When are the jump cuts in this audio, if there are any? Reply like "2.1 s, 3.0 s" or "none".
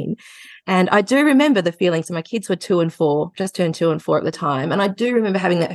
none